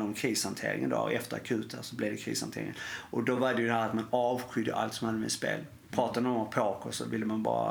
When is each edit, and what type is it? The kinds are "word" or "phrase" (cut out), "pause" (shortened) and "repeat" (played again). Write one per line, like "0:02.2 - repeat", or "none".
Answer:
none